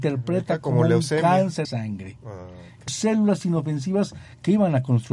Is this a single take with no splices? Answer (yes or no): no